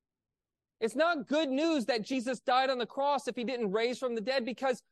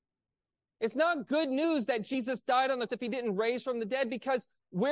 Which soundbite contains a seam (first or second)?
second